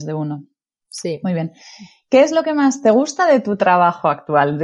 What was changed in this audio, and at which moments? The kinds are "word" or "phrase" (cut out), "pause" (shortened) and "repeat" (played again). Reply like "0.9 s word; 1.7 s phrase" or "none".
none